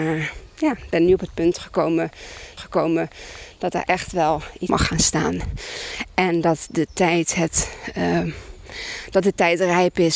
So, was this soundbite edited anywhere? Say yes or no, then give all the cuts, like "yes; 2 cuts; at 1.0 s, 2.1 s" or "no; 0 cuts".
yes; 2 cuts; at 2.6 s, 4.7 s